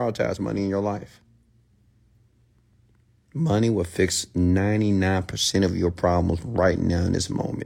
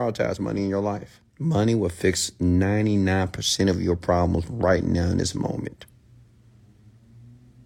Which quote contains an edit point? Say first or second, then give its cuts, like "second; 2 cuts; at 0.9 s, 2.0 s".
second; 1 cut; at 1.3 s